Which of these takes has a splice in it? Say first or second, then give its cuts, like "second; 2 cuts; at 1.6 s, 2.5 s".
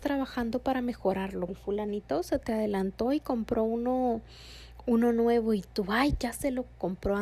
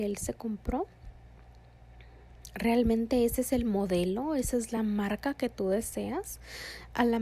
first; 1 cut; at 1.5 s